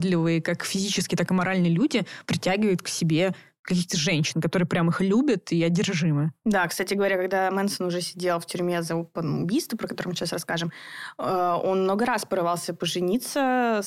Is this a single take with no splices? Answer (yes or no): yes